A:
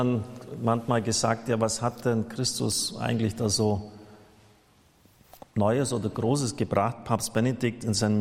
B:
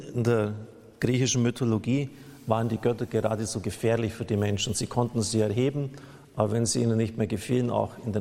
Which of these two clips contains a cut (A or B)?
A